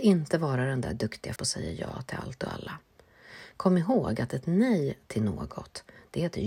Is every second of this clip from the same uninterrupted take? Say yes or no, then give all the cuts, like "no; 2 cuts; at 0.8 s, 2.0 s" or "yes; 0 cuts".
no; 1 cut; at 1.4 s